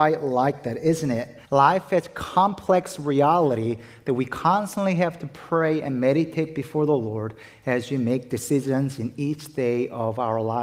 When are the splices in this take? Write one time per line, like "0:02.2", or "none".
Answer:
0:01.4